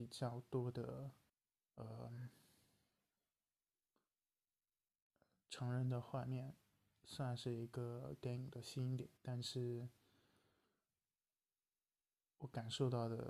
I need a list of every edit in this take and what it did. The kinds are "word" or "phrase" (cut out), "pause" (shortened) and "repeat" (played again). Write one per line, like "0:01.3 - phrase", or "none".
0:01.3 - pause
0:09.2 - pause